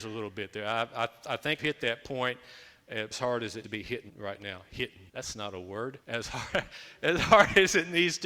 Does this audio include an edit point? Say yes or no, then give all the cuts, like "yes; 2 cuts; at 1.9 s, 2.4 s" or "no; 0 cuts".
yes; 6 cuts; at 1.6 s, 3.1 s, 3.6 s, 4.1 s, 5.1 s, 6.0 s